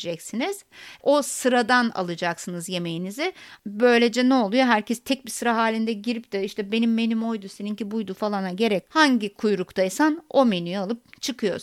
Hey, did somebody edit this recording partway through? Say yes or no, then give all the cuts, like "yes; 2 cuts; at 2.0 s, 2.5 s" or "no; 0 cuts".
yes; 1 cut; at 8.9 s